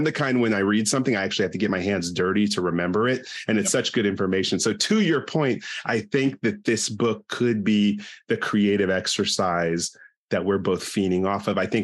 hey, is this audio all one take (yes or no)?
yes